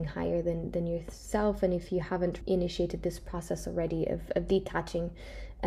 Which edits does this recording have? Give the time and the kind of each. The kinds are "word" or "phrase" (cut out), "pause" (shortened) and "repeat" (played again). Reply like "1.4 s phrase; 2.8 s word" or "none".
2.4 s word